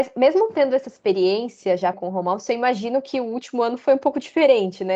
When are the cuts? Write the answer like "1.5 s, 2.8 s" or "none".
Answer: 1.9 s